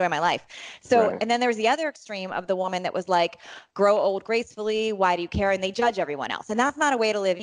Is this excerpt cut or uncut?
uncut